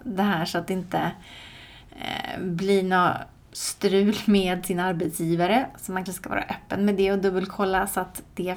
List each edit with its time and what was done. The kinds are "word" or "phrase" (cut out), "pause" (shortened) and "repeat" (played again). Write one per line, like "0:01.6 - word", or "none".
0:06.1 - word